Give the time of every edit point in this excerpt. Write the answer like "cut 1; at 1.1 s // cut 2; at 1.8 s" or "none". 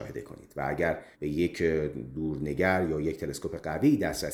cut 1; at 1.1 s